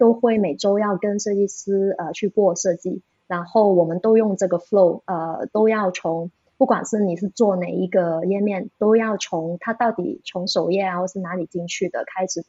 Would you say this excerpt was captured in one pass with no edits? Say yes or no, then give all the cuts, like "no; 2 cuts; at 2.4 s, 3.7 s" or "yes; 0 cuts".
yes; 0 cuts